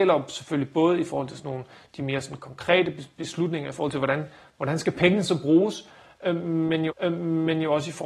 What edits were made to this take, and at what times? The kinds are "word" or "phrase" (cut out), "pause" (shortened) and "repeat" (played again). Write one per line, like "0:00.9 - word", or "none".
0:06.9 - repeat